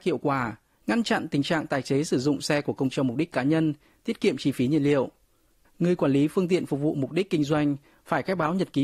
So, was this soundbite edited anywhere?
yes; 1 cut; at 2.9 s

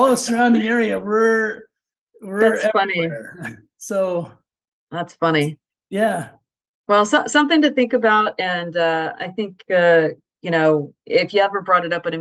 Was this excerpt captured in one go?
no; 1 cut; at 9.1 s

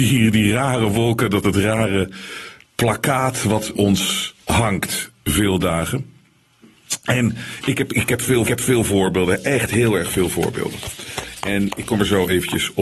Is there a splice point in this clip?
yes; 4 cuts; at 1.4 s, 3.7 s, 4.4 s, 8.5 s

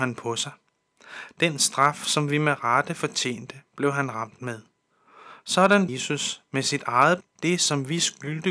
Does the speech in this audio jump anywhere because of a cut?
yes; 2 cuts; at 5.9 s, 7.2 s

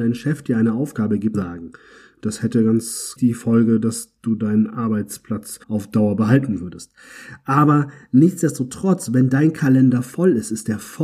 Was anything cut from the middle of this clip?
yes; 3 cuts; at 1.3 s, 3.2 s, 5.6 s

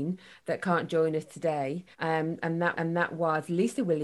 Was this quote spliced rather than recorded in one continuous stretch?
yes; 2 cuts; at 1.9 s, 2.7 s

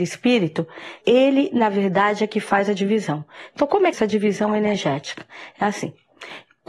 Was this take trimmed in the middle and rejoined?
yes; 2 cuts; at 1.0 s, 3.9 s

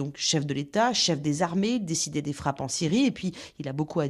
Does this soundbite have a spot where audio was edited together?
no; 0 cuts

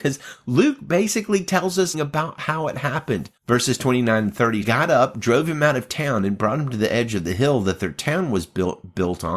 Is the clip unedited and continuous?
no; 3 cuts; at 1.9 s, 3.4 s, 4.6 s

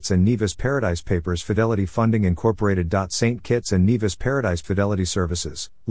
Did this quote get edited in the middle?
yes; 1 cut; at 4.6 s

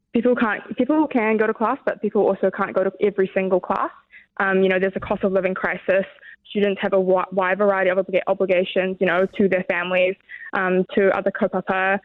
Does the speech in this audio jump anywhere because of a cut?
no; 0 cuts

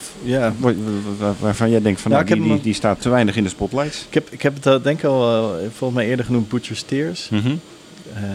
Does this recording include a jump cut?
yes; 1 cut; at 3.0 s

